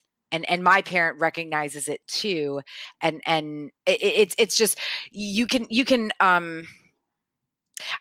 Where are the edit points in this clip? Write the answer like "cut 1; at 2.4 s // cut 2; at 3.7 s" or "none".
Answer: cut 1; at 3.8 s